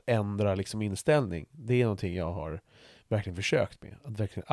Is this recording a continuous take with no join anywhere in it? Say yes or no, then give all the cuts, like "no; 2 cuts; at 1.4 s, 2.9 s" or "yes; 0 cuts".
yes; 0 cuts